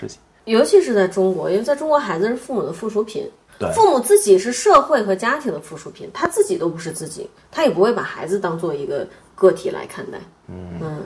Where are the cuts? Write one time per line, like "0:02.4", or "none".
0:03.5